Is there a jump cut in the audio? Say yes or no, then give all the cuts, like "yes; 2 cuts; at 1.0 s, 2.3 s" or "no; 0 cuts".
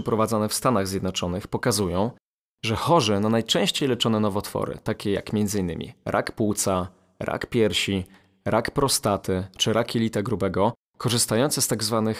no; 0 cuts